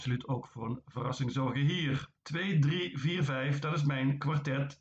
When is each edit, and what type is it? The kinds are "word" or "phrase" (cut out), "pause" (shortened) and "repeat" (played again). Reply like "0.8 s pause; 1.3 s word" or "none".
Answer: 2.2 s pause

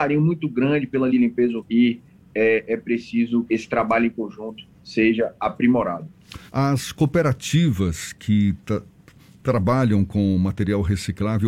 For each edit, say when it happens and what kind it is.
1.1 s phrase; 1.6 s word; 2.7 s word; 3.5 s word; 4.7 s pause; 6.5 s pause

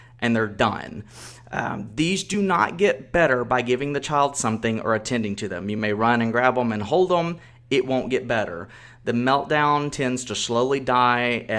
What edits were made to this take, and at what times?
none

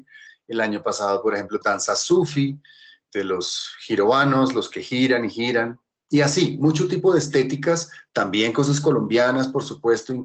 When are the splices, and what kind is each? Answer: 1.6 s word

